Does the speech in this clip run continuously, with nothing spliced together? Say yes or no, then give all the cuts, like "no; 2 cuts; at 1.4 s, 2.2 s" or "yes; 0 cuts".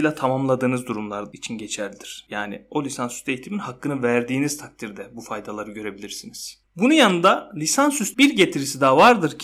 no; 1 cut; at 8.1 s